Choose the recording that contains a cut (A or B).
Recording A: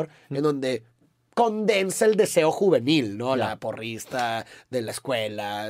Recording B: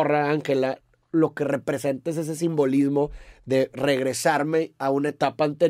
A